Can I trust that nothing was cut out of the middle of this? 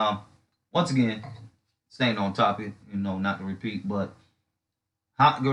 no; 1 cut; at 2.8 s

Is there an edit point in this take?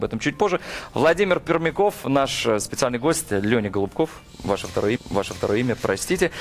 yes; 1 cut; at 5.0 s

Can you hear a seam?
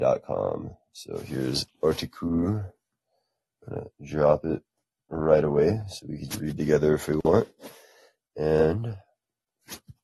yes; 2 cuts; at 1.7 s, 6.3 s

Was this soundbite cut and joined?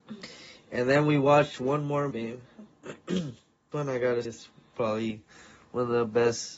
yes; 3 cuts; at 2.1 s, 3.7 s, 4.2 s

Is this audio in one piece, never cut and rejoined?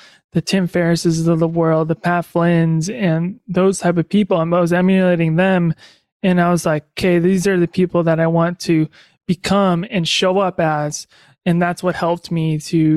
yes; 0 cuts

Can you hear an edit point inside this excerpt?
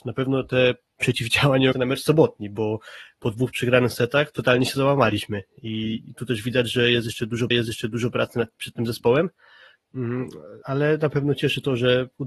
yes; 3 cuts; at 1.7 s, 7.5 s, 10.6 s

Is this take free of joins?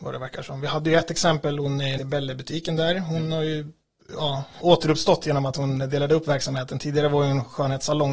no; 2 cuts; at 2.0 s, 4.6 s

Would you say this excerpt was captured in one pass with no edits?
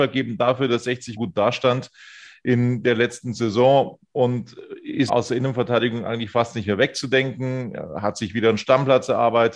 no; 2 cuts; at 1.2 s, 5.1 s

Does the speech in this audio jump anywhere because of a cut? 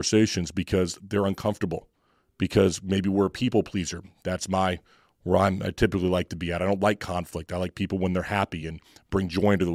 no; 0 cuts

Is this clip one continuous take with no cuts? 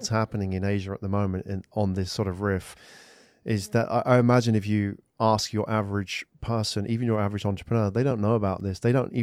yes; 0 cuts

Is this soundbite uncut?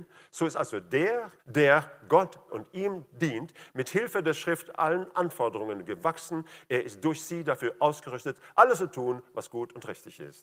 no; 2 cuts; at 1.4 s, 2.5 s

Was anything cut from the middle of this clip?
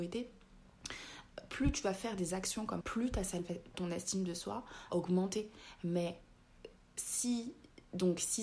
yes; 3 cuts; at 2.8 s, 3.7 s, 4.9 s

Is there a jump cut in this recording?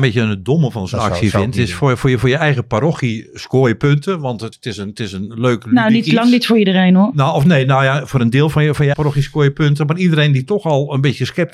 yes; 2 cuts; at 4.5 s, 8.9 s

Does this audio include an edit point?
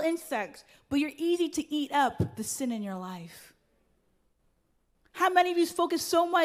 no; 0 cuts

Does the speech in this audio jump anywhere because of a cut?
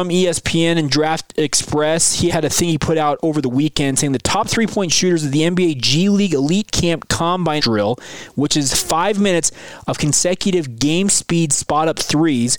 yes; 2 cuts; at 2.3 s, 7.6 s

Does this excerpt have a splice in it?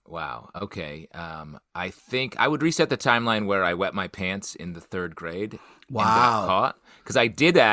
no; 0 cuts

